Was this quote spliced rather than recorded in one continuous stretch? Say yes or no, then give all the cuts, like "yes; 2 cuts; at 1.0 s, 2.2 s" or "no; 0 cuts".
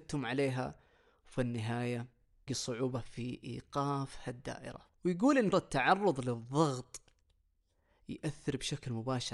yes; 3 cuts; at 2.5 s, 4.9 s, 5.5 s